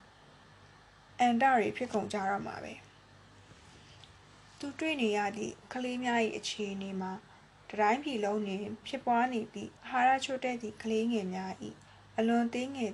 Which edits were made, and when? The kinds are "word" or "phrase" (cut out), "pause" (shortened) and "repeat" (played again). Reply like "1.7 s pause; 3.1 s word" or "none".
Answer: 9.8 s pause